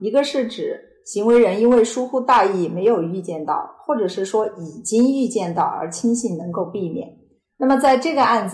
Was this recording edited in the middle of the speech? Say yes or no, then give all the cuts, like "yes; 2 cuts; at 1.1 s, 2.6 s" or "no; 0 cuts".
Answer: no; 0 cuts